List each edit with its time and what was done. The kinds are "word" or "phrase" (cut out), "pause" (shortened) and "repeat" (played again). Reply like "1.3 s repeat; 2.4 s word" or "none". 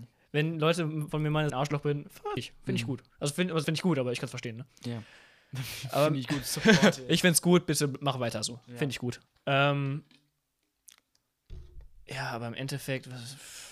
1.5 s phrase; 2.4 s word; 3.1 s pause; 3.6 s word; 9.3 s pause